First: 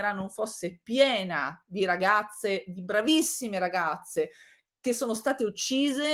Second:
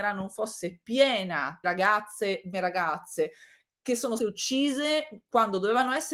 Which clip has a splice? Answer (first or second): second